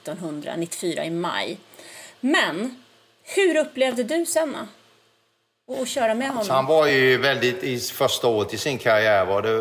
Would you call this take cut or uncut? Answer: uncut